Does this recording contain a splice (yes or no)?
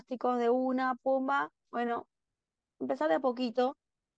no